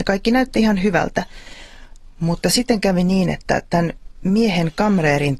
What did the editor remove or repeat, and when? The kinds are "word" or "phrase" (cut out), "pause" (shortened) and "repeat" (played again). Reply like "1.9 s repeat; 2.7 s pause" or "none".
none